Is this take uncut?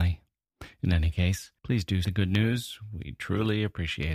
no; 2 cuts; at 1.6 s, 2.0 s

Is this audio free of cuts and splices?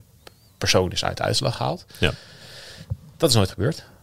yes; 0 cuts

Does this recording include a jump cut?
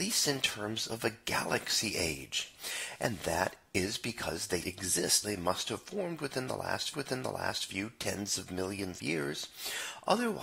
yes; 4 cuts; at 4.6 s, 5.2 s, 6.9 s, 9.0 s

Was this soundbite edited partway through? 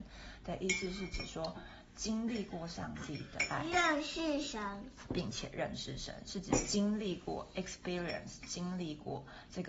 no; 0 cuts

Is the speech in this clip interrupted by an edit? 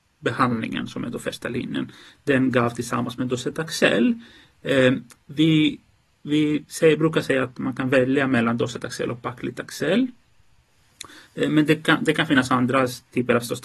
no; 0 cuts

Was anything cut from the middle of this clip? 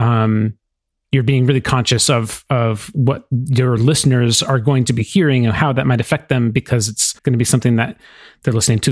yes; 1 cut; at 7.2 s

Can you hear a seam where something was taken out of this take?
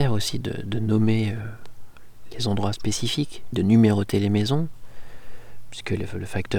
yes; 2 cuts; at 2.3 s, 3.5 s

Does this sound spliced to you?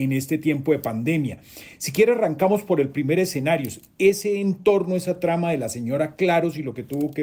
no; 0 cuts

